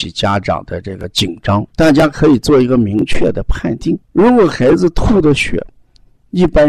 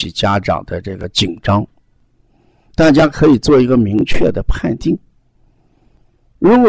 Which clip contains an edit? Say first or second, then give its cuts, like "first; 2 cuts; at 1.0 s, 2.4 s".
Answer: first; 2 cuts; at 1.7 s, 4.0 s